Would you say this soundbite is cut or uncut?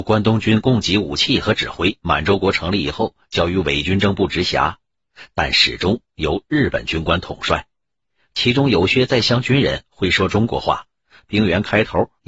cut